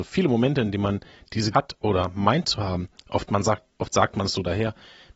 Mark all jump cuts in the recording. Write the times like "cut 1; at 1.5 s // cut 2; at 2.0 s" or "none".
cut 1; at 1.5 s // cut 2; at 3.7 s